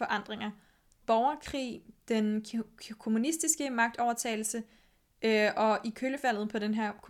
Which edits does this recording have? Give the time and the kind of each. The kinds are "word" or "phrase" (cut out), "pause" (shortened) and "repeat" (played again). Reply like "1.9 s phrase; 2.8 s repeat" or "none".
1.0 s phrase